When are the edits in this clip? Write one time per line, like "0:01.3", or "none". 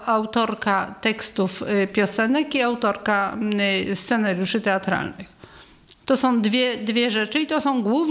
none